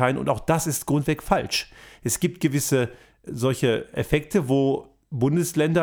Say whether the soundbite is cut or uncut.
uncut